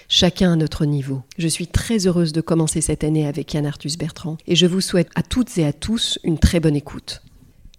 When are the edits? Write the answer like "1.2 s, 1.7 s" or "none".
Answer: 1.3 s, 4.4 s